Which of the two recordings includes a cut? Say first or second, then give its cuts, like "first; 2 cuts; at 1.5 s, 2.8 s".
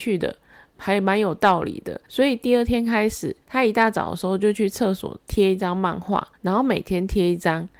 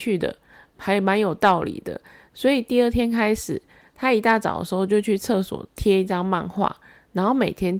first; 3 cuts; at 2.0 s, 3.4 s, 6.3 s